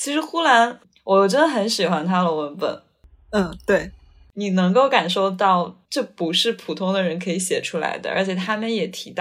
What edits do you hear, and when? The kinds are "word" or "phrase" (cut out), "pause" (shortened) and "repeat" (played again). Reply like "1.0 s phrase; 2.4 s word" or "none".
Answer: 5.8 s pause